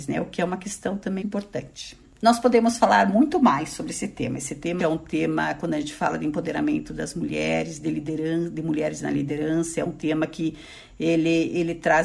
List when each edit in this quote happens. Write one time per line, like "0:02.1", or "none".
0:01.2
0:04.8